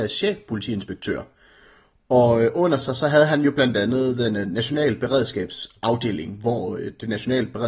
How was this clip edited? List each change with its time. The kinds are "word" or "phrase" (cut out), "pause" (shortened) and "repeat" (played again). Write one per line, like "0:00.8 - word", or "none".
none